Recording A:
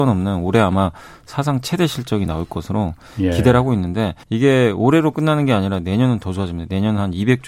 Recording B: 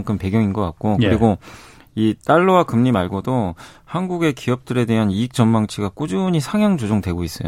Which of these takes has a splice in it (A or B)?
A